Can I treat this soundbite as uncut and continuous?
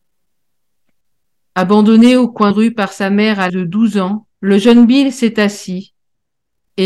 no; 3 cuts; at 2.5 s, 3.5 s, 4.3 s

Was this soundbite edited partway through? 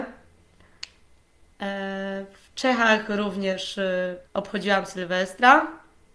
yes; 1 cut; at 4.3 s

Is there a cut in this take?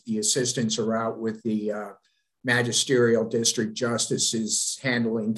no; 0 cuts

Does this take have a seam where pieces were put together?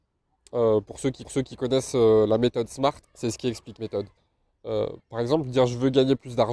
yes; 4 cuts; at 1.2 s, 3.0 s, 3.8 s, 4.2 s

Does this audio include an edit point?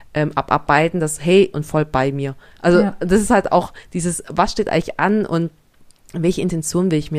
yes; 1 cut; at 1.5 s

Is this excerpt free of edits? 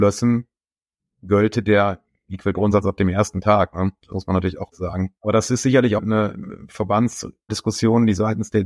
no; 6 cuts; at 2.5 s, 4.1 s, 4.7 s, 5.2 s, 6.0 s, 7.5 s

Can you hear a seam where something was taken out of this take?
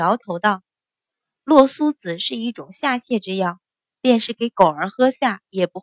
no; 0 cuts

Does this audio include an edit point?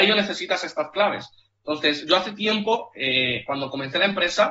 no; 0 cuts

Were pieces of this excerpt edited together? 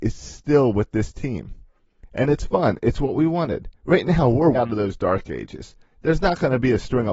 yes; 2 cuts; at 3.8 s, 4.5 s

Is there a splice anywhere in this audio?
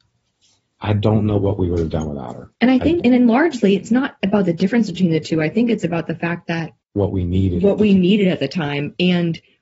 yes; 3 cuts; at 2.5 s, 3.0 s, 6.8 s

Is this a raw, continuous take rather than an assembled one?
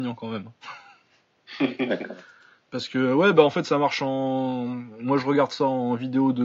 yes; 0 cuts

